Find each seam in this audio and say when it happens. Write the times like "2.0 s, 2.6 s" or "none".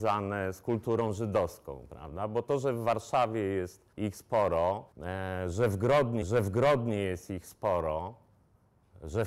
3.9 s, 4.9 s, 6.2 s